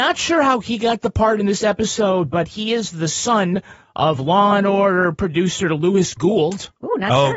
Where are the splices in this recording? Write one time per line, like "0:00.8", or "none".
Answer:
none